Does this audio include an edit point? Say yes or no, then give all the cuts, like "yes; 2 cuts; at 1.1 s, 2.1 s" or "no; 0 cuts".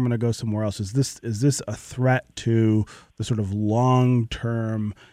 no; 0 cuts